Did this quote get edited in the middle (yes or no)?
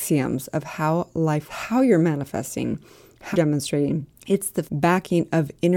yes